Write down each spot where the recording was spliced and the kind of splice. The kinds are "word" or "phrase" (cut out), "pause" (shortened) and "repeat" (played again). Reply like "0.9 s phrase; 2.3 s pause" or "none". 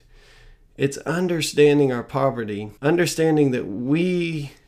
2.8 s pause